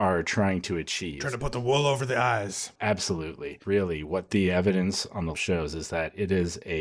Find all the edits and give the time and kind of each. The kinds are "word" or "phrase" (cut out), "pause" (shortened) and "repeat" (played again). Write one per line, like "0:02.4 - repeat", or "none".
0:05.3 - word